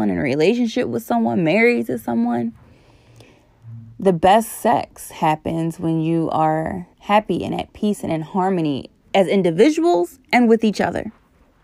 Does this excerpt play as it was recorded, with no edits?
no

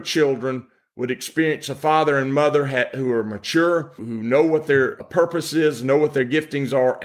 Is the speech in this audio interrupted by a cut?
no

